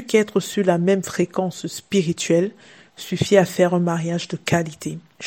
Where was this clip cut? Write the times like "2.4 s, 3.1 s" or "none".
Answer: none